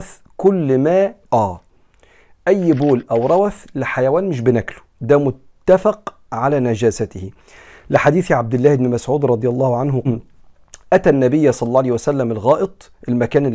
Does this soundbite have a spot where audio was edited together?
yes; 2 cuts; at 1.2 s, 10.0 s

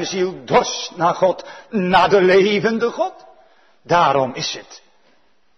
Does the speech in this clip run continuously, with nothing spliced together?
yes; 0 cuts

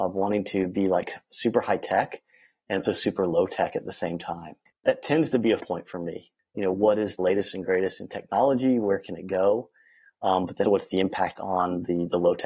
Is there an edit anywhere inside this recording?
yes; 4 cuts; at 2.8 s, 5.6 s, 7.2 s, 10.6 s

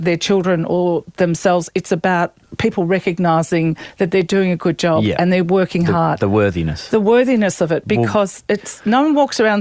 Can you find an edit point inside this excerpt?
yes; 1 cut; at 2.4 s

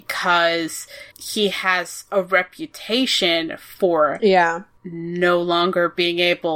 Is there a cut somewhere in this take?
yes; 1 cut; at 1.1 s

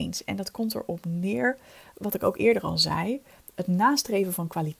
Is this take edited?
no; 0 cuts

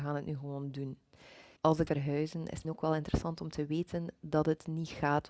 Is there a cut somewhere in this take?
yes; 3 cuts; at 1.6 s, 1.9 s, 2.6 s

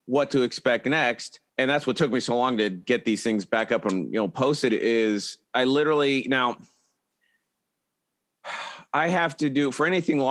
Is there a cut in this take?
yes; 2 cuts; at 1.5 s, 5.4 s

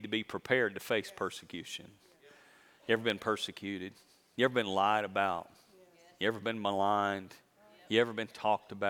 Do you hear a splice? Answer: no; 0 cuts

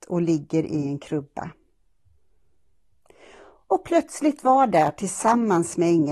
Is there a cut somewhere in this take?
no; 0 cuts

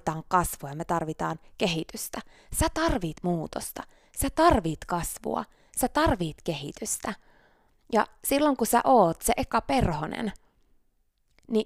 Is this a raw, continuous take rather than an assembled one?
yes; 0 cuts

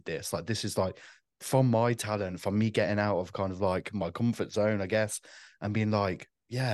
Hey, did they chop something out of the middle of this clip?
no; 0 cuts

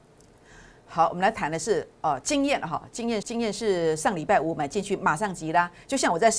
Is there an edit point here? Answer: yes; 1 cut; at 3.2 s

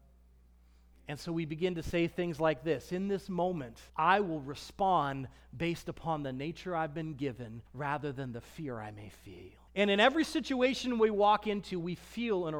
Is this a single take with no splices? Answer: no; 3 cuts; at 3.9 s, 7.7 s, 9.7 s

